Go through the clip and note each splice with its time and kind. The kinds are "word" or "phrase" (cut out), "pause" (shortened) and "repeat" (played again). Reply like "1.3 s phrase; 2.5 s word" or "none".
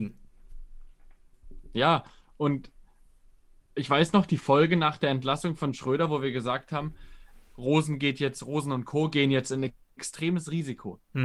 none